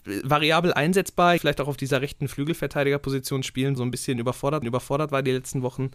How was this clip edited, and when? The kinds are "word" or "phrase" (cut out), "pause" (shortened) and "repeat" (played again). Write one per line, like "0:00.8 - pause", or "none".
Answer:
0:01.4 - phrase
0:03.8 - phrase
0:04.6 - repeat